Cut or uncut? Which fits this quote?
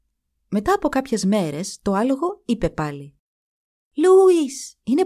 uncut